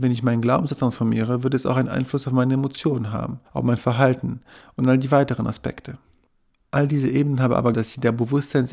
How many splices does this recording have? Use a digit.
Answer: 2